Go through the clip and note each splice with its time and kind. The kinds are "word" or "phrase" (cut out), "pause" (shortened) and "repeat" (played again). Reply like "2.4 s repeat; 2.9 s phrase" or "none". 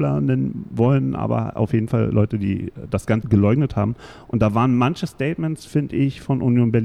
3.2 s word